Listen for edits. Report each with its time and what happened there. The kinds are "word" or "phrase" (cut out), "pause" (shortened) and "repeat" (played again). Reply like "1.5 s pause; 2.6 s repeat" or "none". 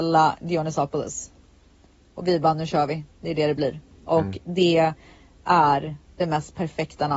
none

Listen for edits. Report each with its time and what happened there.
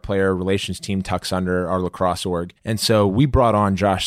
2.6 s pause

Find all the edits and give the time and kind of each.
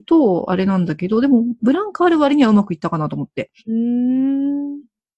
3.6 s pause

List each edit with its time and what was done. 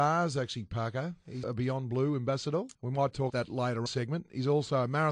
1.4 s word; 2.7 s pause; 3.3 s word; 3.9 s phrase

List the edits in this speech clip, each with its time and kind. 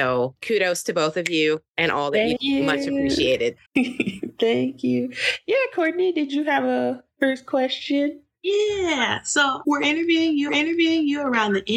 1.7 s pause; 2.4 s word; 3.7 s pause; 9.6 s word; 10.5 s repeat

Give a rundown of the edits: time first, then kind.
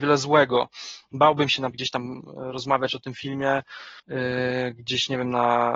1.7 s word; 4.0 s pause

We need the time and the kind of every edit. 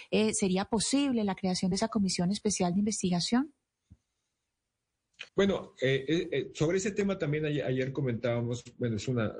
5.3 s pause

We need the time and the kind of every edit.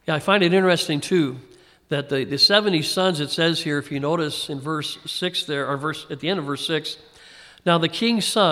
none

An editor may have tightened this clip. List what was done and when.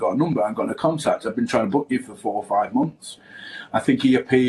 none

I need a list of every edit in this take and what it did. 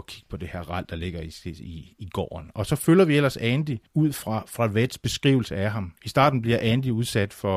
3.9 s pause; 6.0 s pause

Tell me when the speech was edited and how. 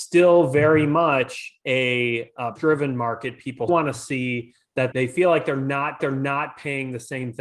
2.6 s word; 3.7 s word; 4.9 s word; 6.0 s repeat

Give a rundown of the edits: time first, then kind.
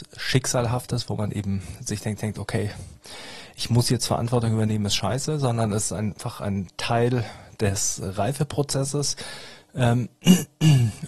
2.2 s repeat

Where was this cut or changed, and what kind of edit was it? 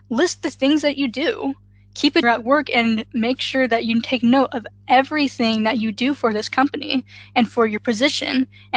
2.2 s phrase

